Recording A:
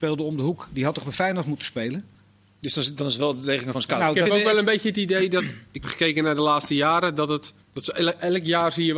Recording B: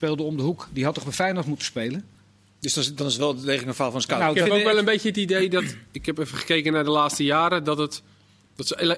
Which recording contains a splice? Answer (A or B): A